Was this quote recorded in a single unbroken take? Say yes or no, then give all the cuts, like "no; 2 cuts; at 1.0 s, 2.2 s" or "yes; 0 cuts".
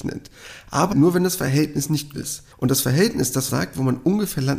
no; 4 cuts; at 0.9 s, 2.1 s, 2.5 s, 3.5 s